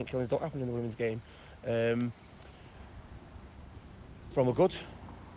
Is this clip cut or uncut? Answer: cut